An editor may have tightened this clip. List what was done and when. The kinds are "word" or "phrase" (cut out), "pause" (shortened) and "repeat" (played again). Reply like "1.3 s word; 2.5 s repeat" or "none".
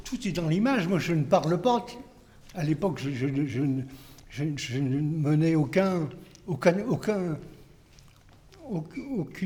none